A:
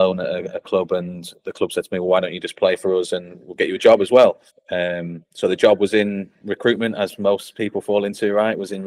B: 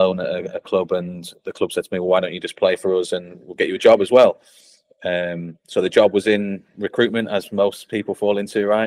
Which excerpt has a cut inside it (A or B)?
A